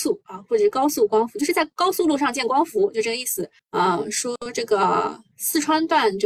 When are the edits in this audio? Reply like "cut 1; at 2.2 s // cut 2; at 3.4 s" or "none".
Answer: cut 1; at 3.6 s